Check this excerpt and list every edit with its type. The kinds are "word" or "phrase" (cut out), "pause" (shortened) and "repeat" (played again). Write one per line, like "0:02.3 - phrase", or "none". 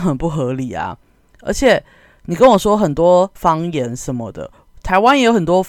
none